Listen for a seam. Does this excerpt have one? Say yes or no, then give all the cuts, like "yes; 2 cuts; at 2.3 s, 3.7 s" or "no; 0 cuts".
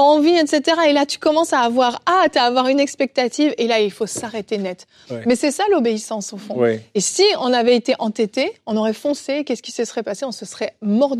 no; 0 cuts